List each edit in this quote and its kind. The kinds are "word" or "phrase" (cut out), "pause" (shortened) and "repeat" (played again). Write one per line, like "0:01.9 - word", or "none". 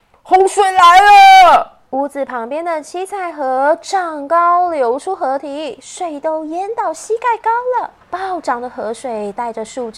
0:01.9 - pause
0:08.0 - pause